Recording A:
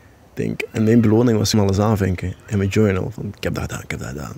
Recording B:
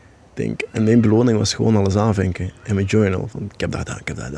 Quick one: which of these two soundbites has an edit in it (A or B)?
A